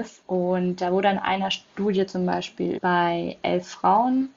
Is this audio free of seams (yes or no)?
no